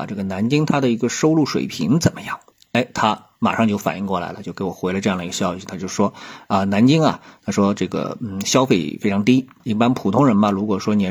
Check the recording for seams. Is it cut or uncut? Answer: uncut